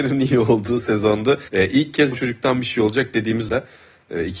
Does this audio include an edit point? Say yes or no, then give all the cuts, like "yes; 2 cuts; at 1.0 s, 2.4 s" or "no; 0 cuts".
yes; 3 cuts; at 1.5 s, 2.1 s, 3.5 s